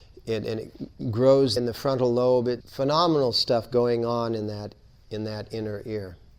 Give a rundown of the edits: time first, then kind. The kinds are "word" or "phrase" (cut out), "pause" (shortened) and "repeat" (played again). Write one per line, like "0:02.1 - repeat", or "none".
0:01.6 - phrase
0:02.6 - word